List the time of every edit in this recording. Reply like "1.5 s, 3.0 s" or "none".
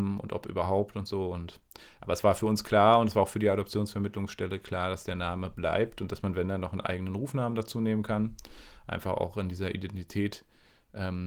none